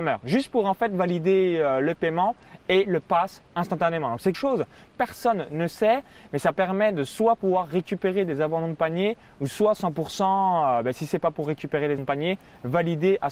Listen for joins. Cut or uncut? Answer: cut